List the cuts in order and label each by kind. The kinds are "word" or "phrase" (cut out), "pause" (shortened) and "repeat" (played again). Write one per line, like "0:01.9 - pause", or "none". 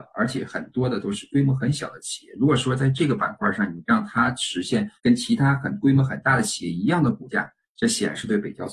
0:04.9 - pause